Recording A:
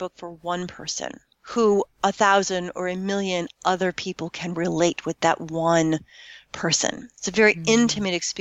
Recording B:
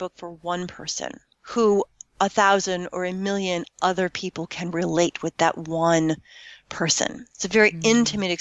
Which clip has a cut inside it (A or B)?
A